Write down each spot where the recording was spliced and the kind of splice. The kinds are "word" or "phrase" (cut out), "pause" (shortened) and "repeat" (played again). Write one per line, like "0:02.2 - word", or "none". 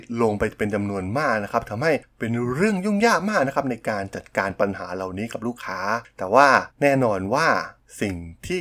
0:06.7 - pause